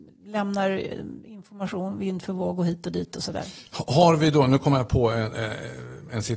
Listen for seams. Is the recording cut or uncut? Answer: uncut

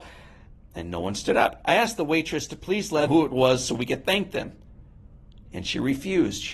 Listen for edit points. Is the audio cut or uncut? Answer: cut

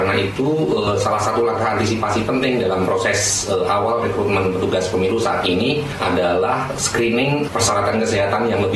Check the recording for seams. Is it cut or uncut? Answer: uncut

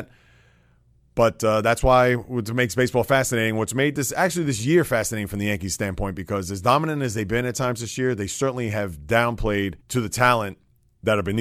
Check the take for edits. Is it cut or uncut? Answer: cut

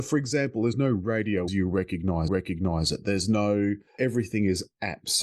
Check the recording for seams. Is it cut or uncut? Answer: cut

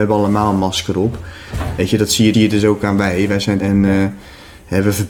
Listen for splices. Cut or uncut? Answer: cut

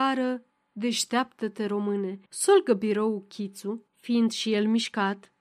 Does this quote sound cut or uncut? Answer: cut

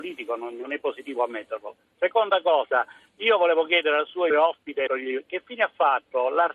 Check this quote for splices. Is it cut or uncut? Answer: cut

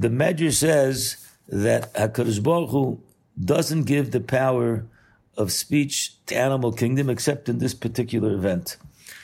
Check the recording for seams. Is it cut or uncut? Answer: cut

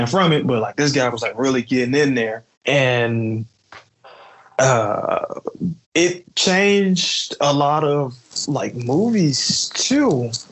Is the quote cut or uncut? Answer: cut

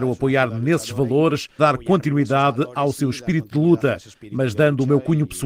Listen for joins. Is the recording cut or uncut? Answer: cut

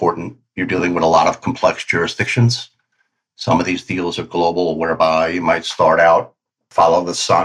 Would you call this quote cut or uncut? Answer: uncut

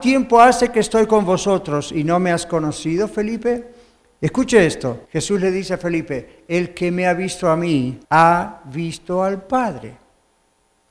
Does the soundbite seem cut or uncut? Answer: cut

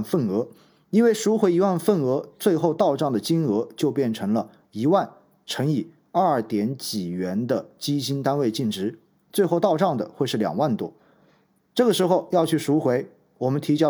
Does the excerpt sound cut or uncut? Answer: uncut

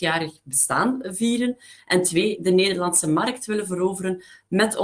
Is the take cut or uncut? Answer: uncut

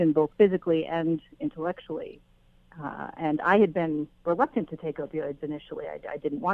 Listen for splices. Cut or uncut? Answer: uncut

